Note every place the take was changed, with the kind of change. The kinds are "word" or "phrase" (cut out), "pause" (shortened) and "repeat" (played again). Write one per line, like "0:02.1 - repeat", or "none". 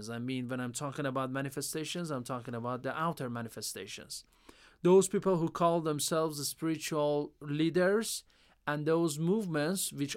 none